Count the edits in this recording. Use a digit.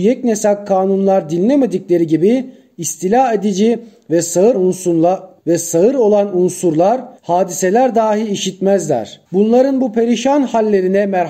3